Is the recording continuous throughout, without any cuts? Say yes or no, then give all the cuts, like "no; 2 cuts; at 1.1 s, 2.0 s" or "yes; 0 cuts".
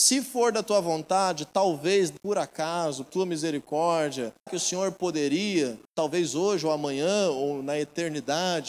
no; 4 cuts; at 2.2 s, 3.1 s, 4.5 s, 5.9 s